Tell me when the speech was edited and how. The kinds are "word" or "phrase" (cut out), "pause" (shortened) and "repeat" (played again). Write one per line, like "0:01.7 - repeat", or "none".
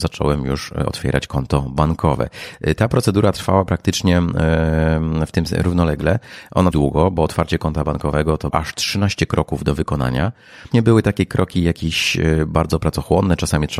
0:06.7 - phrase
0:08.5 - word
0:10.7 - phrase